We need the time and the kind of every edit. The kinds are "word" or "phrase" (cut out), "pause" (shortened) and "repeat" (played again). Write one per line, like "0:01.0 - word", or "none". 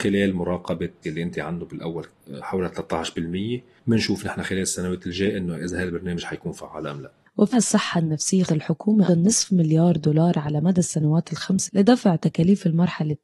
0:01.0 - word
0:01.3 - word
0:07.5 - word
0:08.5 - word
0:09.1 - word
0:11.7 - word